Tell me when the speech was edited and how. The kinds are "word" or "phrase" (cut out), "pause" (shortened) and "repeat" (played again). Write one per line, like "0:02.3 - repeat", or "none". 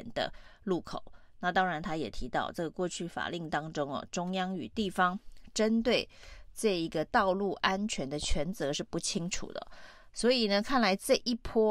none